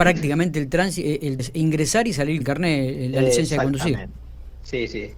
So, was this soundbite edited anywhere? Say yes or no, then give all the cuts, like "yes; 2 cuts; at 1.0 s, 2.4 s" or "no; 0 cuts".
yes; 2 cuts; at 1.4 s, 2.4 s